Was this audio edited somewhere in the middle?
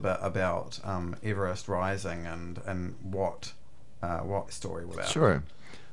yes; 1 cut; at 4.5 s

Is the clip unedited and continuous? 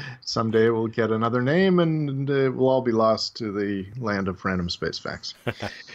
yes; 0 cuts

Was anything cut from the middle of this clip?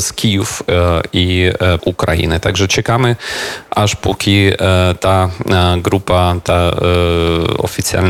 yes; 1 cut; at 1.8 s

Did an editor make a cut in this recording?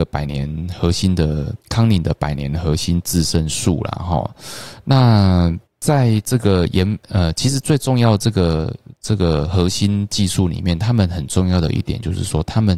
yes; 2 cuts; at 1.6 s, 5.6 s

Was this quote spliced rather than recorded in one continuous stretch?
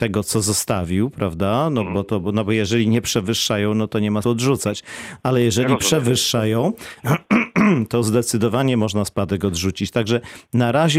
yes; 2 cuts; at 1.9 s, 4.2 s

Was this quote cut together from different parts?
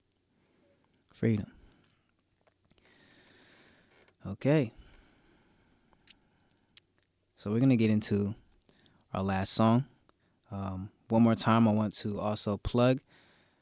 no; 0 cuts

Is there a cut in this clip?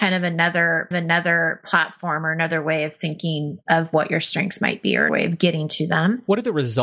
yes; 2 cuts; at 0.9 s, 5.1 s

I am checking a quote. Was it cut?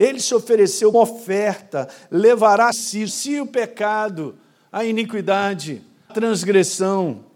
yes; 4 cuts; at 0.9 s, 2.7 s, 3.1 s, 6.1 s

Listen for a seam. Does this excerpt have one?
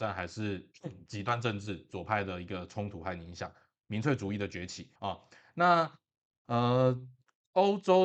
yes; 1 cut; at 5.0 s

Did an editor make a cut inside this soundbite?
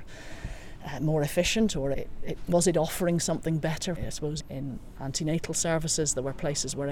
yes; 3 cuts; at 1.9 s, 4.0 s, 4.4 s

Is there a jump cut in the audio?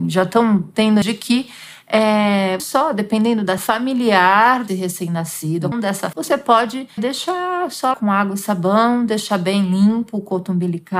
yes; 8 cuts; at 1.0 s, 2.6 s, 3.6 s, 4.7 s, 5.7 s, 6.1 s, 7.0 s, 7.9 s

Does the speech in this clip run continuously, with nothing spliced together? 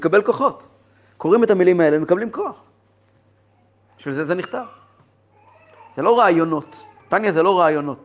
yes; 0 cuts

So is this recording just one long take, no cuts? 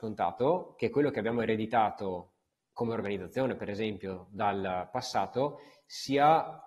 no; 1 cut; at 2.4 s

